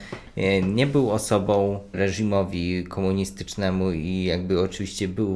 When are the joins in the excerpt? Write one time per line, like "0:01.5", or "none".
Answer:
0:01.9